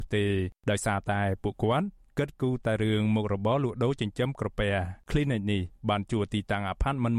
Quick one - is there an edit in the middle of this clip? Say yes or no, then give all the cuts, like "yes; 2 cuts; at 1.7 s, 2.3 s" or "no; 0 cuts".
yes; 1 cut; at 5.0 s